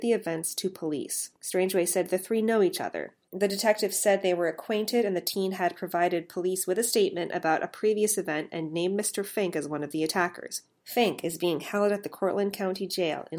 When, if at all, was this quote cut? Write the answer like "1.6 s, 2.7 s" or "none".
1.4 s